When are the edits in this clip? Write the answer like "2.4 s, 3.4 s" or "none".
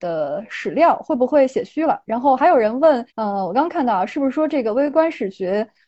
3.1 s